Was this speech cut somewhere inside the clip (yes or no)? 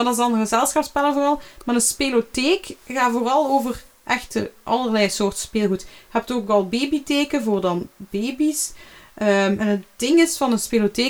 no